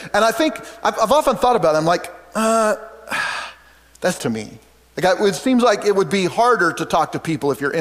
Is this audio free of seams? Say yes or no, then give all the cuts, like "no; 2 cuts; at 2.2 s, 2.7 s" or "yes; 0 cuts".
no; 1 cut; at 4.2 s